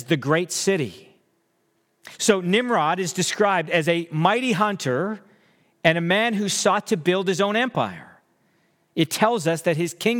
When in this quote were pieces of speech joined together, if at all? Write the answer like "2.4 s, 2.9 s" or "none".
none